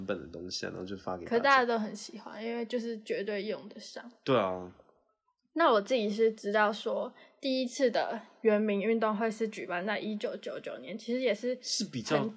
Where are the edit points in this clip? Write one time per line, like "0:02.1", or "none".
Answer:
none